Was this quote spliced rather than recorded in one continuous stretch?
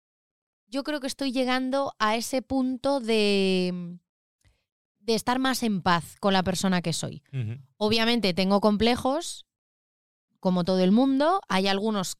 no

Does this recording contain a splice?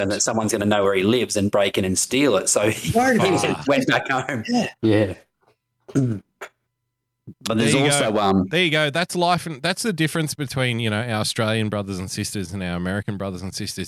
yes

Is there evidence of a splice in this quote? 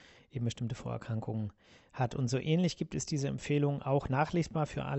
no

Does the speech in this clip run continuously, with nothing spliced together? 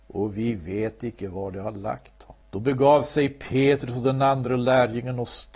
no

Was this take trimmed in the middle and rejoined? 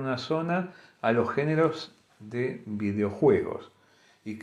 no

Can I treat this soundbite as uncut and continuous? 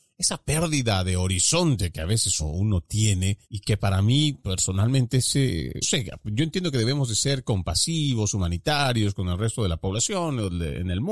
no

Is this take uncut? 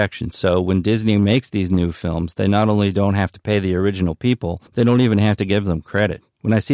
no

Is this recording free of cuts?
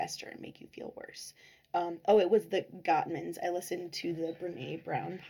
yes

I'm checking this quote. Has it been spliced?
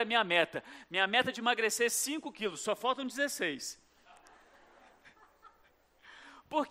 no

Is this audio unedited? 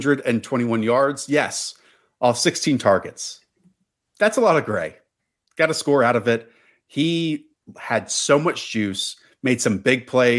yes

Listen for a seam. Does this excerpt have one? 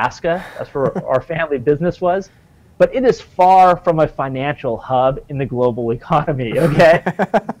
no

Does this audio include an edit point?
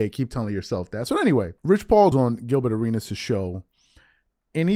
yes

